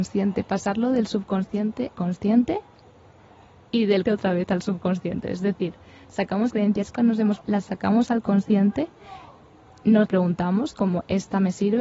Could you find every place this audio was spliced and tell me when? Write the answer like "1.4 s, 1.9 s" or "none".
1.9 s, 4.0 s, 6.5 s, 6.9 s, 7.4 s, 10.1 s